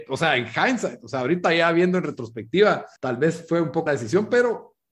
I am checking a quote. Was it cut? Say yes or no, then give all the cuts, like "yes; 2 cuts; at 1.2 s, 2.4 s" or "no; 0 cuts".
yes; 2 cuts; at 3.0 s, 3.9 s